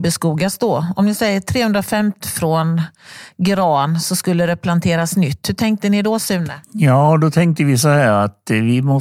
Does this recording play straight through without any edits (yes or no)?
no